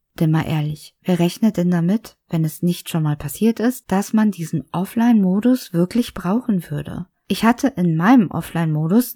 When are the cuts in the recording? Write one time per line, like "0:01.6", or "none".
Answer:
0:07.2